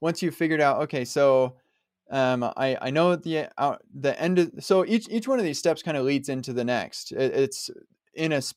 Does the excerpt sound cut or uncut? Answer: uncut